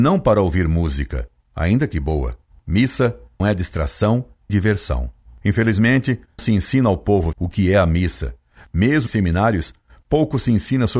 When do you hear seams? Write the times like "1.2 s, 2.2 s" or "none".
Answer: 3.4 s, 4.5 s, 6.4 s, 7.3 s, 9.1 s

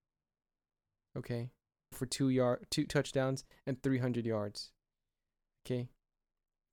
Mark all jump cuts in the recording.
1.9 s, 2.9 s

